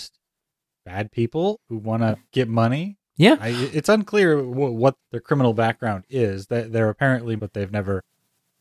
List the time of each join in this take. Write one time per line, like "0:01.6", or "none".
0:01.6
0:02.3
0:03.1
0:05.0
0:07.4